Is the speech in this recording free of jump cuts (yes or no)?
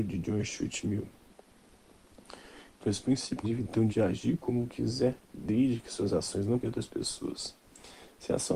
no